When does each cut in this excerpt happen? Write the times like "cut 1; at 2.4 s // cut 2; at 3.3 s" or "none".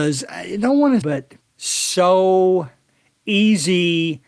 cut 1; at 1.0 s